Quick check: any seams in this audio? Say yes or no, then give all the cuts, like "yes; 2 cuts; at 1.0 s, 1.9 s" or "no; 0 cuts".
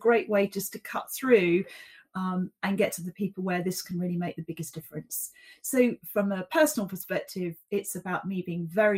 no; 0 cuts